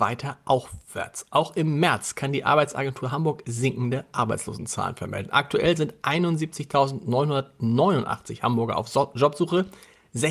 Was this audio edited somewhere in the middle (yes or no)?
no